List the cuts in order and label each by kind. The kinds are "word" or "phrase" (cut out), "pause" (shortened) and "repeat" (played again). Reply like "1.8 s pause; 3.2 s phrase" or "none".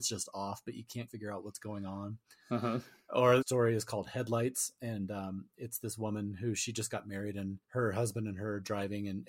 1.1 s word; 3.4 s phrase; 7.6 s pause